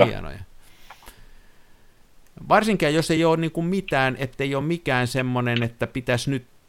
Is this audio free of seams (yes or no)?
yes